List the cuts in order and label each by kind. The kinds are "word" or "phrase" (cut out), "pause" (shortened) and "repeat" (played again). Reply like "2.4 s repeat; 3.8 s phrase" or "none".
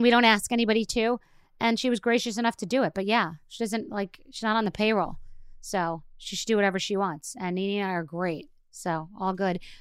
none